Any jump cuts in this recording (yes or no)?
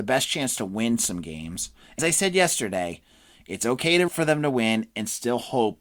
yes